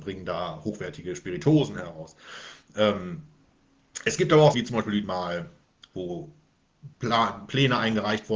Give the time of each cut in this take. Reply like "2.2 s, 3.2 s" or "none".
4.5 s, 5.0 s, 6.9 s